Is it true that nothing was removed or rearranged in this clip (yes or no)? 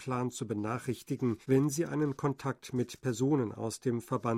no